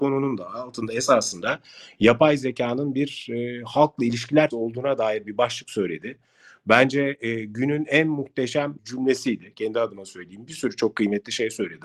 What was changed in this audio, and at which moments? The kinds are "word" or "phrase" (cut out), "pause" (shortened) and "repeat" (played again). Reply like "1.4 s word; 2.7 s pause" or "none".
4.5 s word; 8.8 s word